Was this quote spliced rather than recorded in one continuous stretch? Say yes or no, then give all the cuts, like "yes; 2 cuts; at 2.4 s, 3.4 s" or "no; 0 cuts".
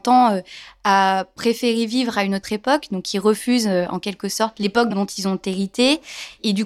no; 0 cuts